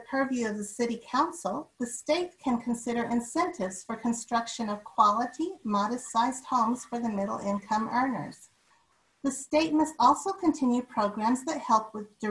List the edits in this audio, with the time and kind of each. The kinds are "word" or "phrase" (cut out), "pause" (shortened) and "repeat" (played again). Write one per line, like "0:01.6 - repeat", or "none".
none